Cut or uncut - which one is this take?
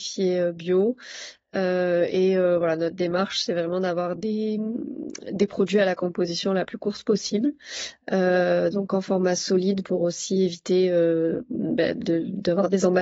uncut